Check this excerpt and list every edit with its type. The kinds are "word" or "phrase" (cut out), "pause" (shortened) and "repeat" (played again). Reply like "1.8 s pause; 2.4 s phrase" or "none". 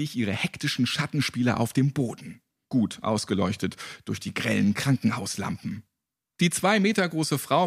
none